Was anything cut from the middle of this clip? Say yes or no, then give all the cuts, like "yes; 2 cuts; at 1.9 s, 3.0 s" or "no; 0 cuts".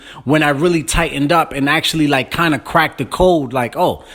no; 0 cuts